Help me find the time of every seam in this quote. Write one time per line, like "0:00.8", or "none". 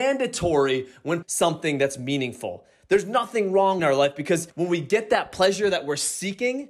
0:01.2
0:03.8
0:04.5